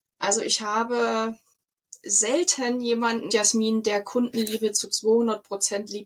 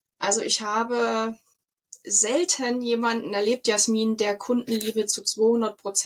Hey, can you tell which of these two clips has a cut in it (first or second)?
first